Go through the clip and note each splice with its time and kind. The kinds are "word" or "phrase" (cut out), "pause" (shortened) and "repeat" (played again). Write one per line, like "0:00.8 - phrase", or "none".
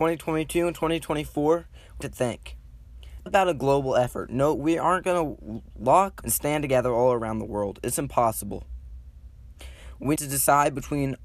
0:02.0 - word
0:03.3 - word
0:06.2 - word
0:10.2 - word